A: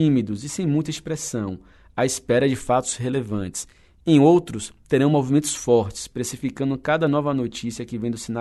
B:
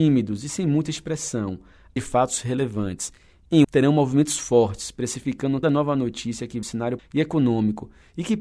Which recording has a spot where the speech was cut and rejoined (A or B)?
B